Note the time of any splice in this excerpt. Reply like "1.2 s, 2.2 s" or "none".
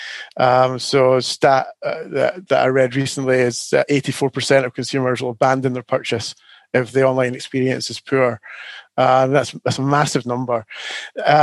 none